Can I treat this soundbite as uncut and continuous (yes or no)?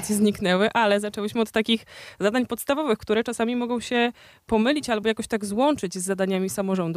yes